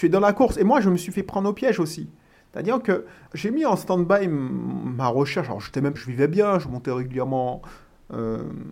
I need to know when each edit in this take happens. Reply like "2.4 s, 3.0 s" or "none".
3.3 s, 6.0 s